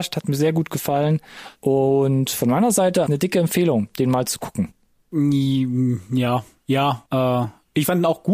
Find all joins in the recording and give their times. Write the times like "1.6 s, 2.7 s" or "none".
3.1 s, 7.1 s